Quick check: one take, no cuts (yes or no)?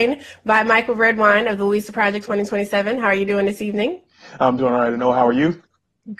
yes